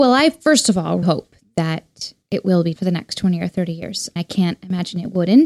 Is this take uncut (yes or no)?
no